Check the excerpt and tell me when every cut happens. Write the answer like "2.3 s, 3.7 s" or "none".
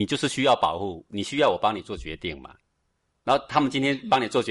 none